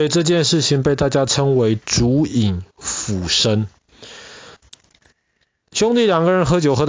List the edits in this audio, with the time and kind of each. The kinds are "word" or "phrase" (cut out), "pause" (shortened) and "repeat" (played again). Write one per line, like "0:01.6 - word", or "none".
0:04.6 - pause